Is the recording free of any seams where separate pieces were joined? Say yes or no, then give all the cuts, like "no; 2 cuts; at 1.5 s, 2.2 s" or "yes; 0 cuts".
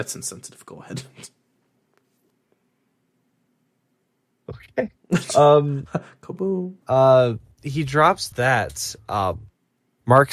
no; 3 cuts; at 5.0 s, 6.8 s, 8.3 s